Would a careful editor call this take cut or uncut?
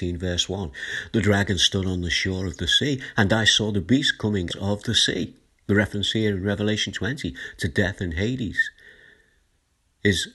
cut